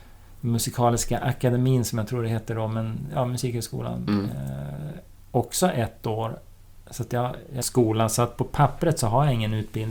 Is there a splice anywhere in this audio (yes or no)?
yes